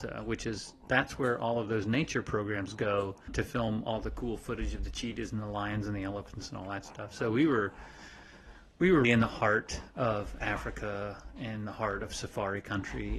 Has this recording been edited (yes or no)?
yes